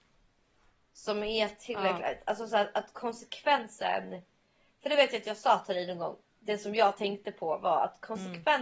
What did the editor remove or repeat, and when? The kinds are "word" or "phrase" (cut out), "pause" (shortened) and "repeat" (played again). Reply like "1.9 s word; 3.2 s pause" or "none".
none